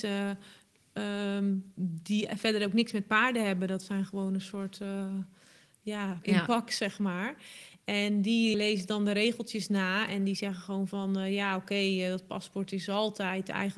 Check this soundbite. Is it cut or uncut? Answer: cut